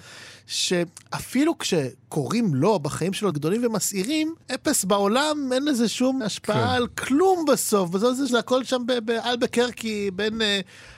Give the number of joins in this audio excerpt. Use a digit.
4